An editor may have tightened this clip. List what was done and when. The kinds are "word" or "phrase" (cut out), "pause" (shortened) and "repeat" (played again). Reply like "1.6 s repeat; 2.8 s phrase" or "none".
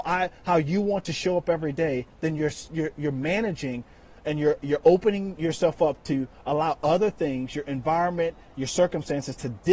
none